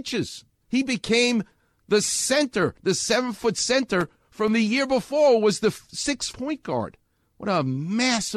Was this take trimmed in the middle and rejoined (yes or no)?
yes